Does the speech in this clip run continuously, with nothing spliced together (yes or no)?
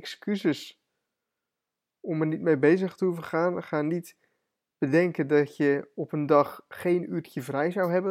yes